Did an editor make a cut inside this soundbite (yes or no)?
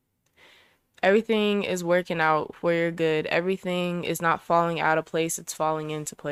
no